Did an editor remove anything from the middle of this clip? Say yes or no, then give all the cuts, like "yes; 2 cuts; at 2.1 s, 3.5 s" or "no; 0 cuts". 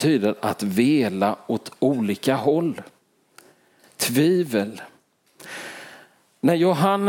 no; 0 cuts